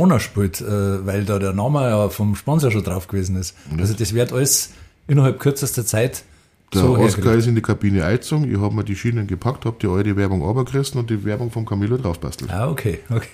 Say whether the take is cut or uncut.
uncut